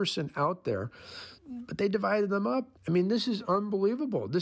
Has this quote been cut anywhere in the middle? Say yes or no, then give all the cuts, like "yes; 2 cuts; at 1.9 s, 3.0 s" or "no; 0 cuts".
yes; 2 cuts; at 1.4 s, 2.8 s